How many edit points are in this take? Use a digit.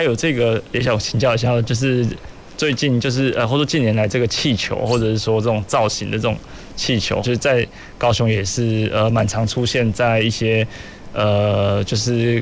1